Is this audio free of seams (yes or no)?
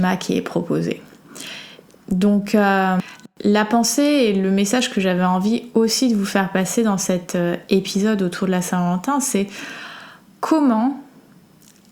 yes